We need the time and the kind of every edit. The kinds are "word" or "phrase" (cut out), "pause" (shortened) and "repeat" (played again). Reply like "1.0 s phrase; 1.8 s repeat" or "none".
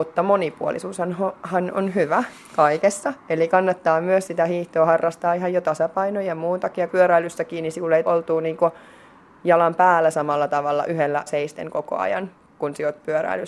6.9 s word; 8.1 s word; 11.3 s word